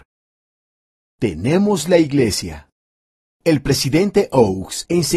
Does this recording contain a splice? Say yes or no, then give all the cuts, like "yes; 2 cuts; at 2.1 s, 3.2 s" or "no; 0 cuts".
no; 0 cuts